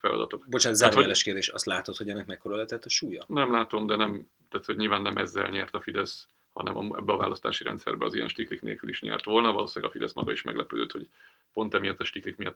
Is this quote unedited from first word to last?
yes; 0 cuts

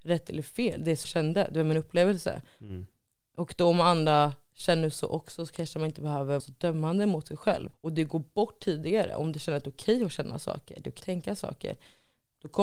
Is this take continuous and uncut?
no; 4 cuts; at 1.0 s, 6.4 s, 7.7 s, 11.0 s

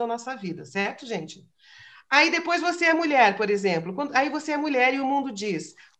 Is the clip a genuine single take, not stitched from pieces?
yes; 0 cuts

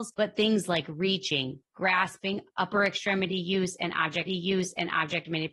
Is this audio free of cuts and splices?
no; 1 cut; at 4.3 s

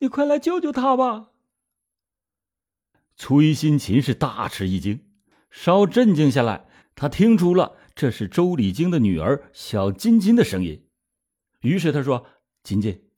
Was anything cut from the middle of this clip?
no; 0 cuts

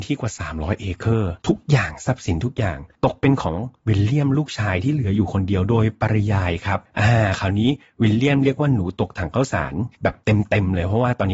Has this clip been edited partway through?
yes; 4 cuts; at 1.4 s, 2.9 s, 6.8 s, 9.9 s

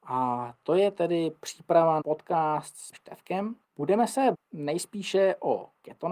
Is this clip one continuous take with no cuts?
no; 4 cuts; at 2.0 s, 2.9 s, 3.6 s, 4.3 s

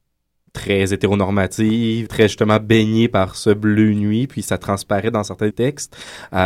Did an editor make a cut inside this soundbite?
yes; 2 cuts; at 2.1 s, 5.5 s

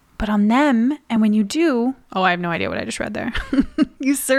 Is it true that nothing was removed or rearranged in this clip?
yes; 0 cuts

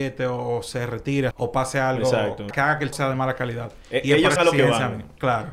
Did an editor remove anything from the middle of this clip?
yes; 4 cuts; at 1.3 s, 2.5 s, 2.9 s, 4.4 s

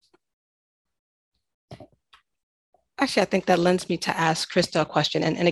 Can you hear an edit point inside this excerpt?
no; 0 cuts

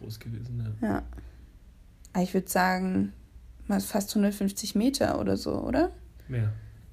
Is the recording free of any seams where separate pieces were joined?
yes; 0 cuts

